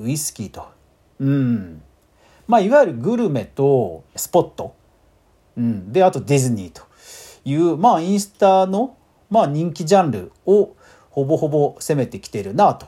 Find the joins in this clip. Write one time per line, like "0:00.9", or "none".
0:04.2